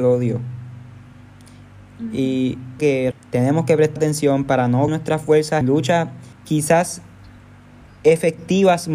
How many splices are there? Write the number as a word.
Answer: six